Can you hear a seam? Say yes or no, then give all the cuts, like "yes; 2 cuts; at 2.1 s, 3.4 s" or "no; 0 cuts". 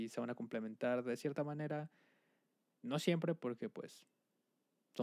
no; 0 cuts